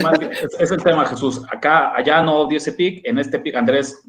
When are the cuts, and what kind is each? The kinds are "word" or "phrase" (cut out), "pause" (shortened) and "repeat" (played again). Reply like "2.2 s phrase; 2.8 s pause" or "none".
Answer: none